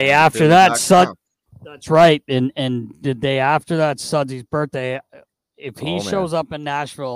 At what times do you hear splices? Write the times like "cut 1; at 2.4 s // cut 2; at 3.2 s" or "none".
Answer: none